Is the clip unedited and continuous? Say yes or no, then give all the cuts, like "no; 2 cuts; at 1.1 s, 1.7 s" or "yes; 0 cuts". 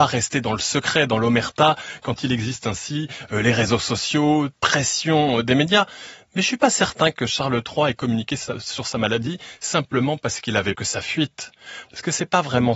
no; 2 cuts; at 4.6 s, 10.7 s